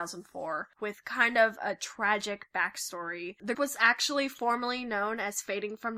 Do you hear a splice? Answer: yes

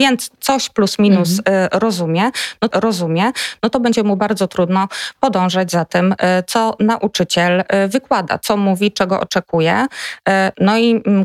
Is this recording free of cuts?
no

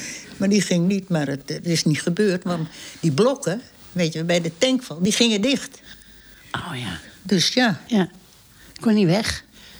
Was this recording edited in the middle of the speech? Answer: no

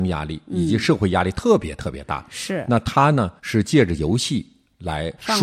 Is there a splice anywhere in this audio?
yes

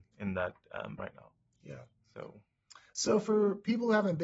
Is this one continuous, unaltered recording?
no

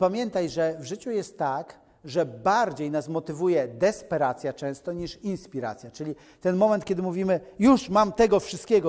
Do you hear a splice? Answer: no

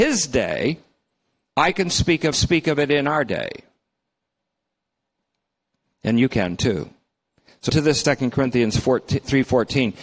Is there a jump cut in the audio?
yes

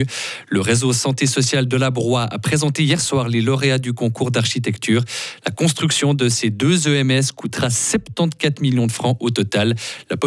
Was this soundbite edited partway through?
no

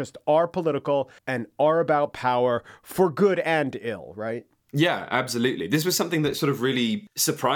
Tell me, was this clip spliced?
yes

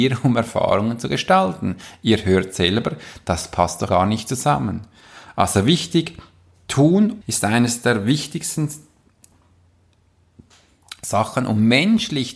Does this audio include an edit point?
yes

